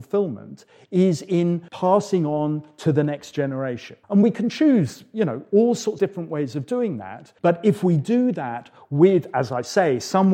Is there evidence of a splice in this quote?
yes; 4 cuts; at 1.7 s, 4.0 s, 6.0 s, 7.4 s

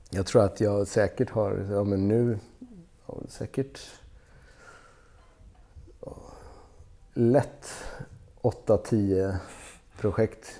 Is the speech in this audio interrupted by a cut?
no; 0 cuts

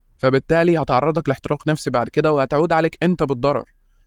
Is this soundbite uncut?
yes; 0 cuts

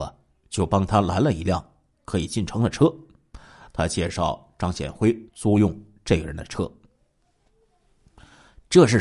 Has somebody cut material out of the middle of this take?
yes; 1 cut; at 5.3 s

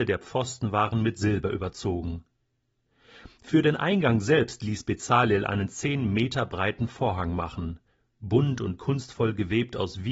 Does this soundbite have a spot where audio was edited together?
no; 0 cuts

